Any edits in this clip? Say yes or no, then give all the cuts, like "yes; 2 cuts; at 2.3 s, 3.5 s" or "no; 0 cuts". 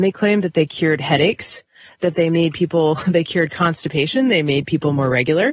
no; 0 cuts